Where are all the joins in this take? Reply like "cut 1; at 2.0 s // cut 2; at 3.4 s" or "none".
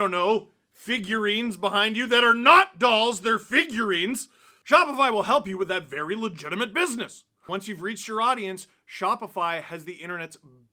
none